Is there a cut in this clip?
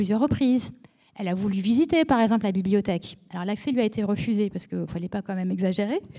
yes; 1 cut; at 4.9 s

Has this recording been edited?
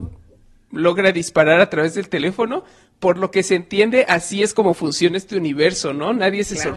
no; 0 cuts

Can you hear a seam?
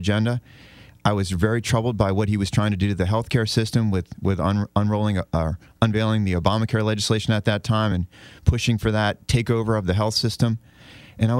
no; 0 cuts

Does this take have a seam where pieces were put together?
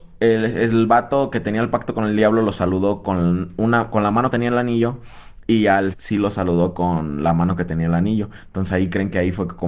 yes; 2 cuts; at 4.3 s, 5.9 s

